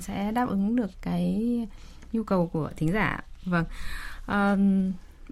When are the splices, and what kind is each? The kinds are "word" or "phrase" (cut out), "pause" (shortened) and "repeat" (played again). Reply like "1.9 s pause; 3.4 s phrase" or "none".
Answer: none

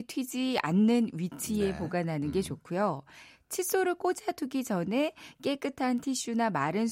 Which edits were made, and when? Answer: none

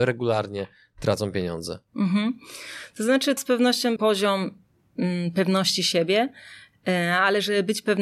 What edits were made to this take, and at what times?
3.4 s word; 4.0 s word

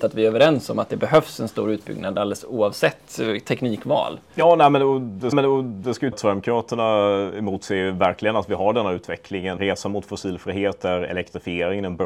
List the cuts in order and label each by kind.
5.3 s repeat; 6.1 s word; 9.6 s word

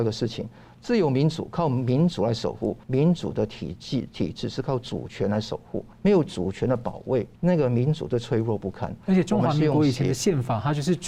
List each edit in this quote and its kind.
2.8 s pause; 5.9 s pause; 7.4 s pause

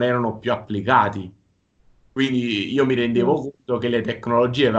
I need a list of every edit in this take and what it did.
none

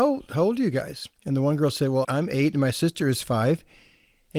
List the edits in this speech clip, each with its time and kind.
1.2 s pause; 2.0 s word

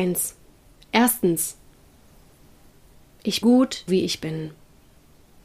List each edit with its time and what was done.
3.4 s word; 3.9 s word

